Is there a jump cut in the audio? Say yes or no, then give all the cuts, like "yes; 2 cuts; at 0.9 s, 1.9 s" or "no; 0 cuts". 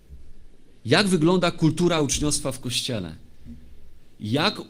no; 0 cuts